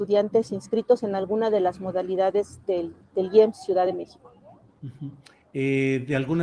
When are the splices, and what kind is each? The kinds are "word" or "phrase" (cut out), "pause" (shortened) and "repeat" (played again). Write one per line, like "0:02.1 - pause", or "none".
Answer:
none